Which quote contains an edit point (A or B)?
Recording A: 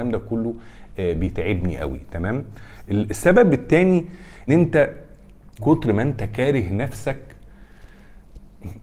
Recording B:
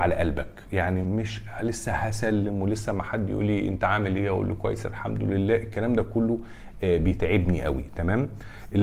A